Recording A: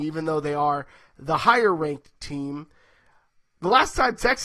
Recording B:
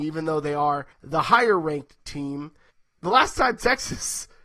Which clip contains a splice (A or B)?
B